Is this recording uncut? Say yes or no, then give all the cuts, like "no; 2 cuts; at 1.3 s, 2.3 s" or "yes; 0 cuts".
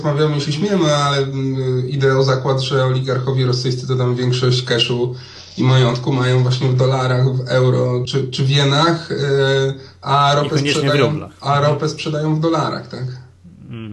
no; 1 cut; at 8.1 s